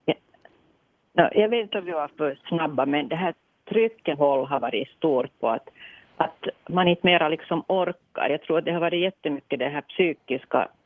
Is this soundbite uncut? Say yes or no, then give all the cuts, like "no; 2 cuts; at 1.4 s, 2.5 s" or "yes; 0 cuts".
no; 1 cut; at 4.1 s